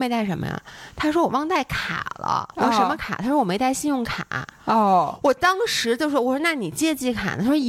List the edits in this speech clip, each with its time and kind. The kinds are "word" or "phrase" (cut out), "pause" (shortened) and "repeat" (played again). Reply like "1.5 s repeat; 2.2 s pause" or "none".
2.5 s pause; 4.5 s pause